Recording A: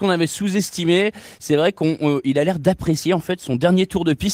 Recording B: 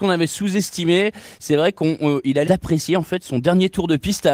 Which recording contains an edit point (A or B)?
B